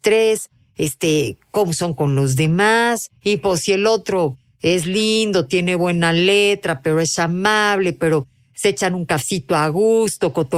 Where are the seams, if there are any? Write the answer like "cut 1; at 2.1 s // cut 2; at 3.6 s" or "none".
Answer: cut 1; at 3.2 s